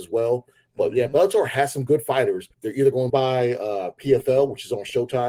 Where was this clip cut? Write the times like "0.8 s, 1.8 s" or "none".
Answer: 2.5 s, 3.1 s